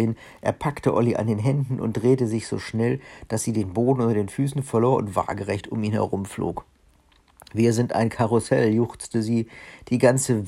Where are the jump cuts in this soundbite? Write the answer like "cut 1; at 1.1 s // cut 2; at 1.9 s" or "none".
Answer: none